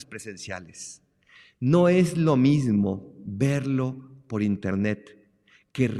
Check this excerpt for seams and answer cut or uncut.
uncut